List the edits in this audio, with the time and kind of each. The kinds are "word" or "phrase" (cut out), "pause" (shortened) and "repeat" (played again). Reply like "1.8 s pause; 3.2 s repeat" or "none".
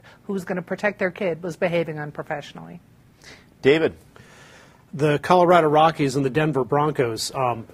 none